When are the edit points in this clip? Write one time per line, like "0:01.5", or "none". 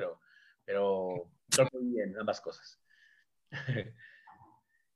0:01.7